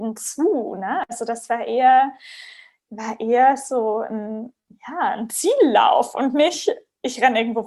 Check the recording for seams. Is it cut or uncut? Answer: uncut